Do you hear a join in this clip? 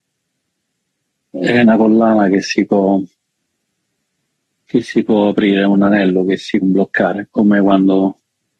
yes; 1 cut; at 6.6 s

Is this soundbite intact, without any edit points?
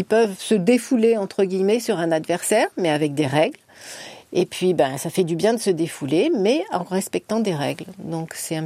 yes; 0 cuts

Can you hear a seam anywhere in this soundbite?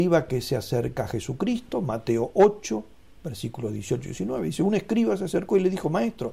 no; 0 cuts

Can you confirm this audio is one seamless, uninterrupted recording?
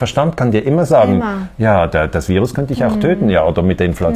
yes; 0 cuts

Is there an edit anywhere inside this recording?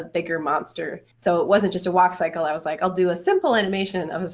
yes; 1 cut; at 1.1 s

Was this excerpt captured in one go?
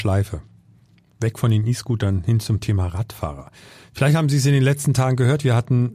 yes; 0 cuts

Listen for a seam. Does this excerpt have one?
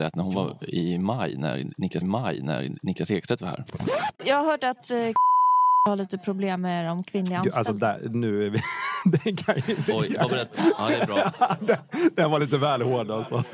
yes; 1 cut; at 2.0 s

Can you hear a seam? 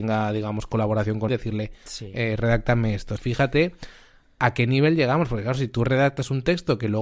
yes; 2 cuts; at 1.3 s, 3.2 s

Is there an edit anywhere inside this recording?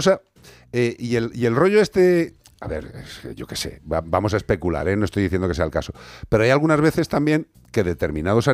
no; 0 cuts

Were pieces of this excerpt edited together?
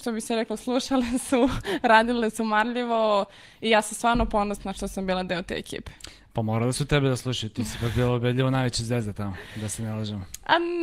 no; 0 cuts

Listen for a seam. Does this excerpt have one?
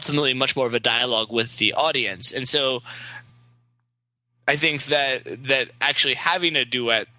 no; 0 cuts

